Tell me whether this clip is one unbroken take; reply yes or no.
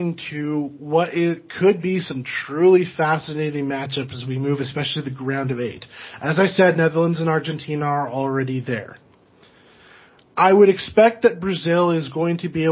yes